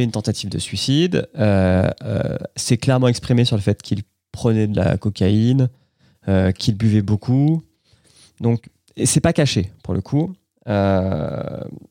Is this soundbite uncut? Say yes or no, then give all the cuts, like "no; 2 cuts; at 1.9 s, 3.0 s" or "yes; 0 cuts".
yes; 0 cuts